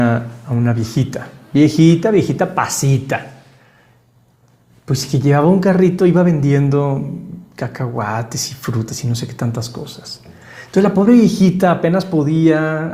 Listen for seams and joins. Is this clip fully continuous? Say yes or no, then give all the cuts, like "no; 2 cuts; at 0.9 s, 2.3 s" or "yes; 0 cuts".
yes; 0 cuts